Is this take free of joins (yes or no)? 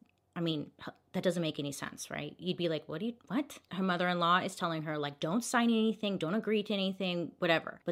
no